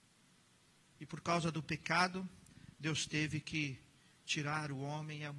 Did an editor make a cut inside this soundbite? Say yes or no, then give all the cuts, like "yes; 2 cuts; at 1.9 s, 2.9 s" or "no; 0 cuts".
no; 0 cuts